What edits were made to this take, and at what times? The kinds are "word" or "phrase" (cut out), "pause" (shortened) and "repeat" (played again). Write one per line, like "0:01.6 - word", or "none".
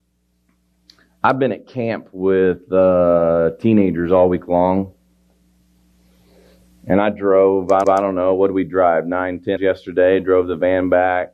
0:07.8 - repeat
0:09.6 - word